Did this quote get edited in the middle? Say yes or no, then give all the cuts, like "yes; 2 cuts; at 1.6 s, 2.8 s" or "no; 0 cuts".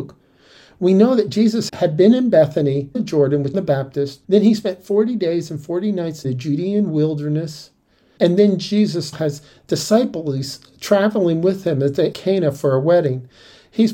yes; 8 cuts; at 1.7 s, 2.9 s, 3.5 s, 4.2 s, 6.2 s, 8.2 s, 9.1 s, 12.1 s